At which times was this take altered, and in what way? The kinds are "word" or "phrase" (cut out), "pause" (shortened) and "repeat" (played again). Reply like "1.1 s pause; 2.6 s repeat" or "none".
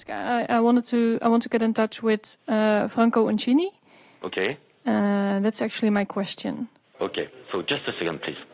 none